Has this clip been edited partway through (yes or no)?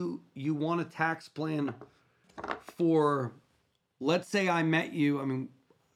no